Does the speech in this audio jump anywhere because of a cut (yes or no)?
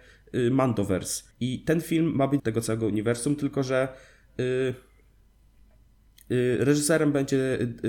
yes